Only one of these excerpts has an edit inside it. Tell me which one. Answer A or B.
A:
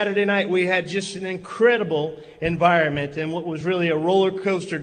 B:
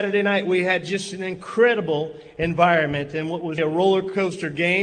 B